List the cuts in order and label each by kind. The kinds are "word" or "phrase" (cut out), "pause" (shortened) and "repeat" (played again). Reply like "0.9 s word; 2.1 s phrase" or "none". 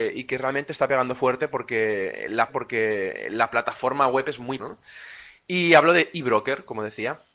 2.5 s repeat; 4.6 s word